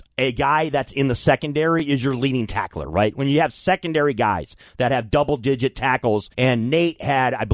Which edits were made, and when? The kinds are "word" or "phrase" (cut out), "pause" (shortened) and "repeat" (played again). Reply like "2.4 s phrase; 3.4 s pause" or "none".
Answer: 6.3 s pause